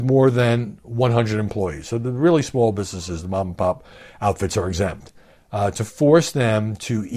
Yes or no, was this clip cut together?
no